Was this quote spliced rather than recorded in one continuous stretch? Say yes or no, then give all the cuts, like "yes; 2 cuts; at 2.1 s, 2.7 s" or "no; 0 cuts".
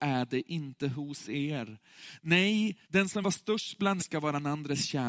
yes; 3 cuts; at 2.8 s, 3.2 s, 4.0 s